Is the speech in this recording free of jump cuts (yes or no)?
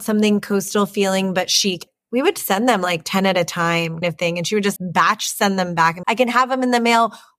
no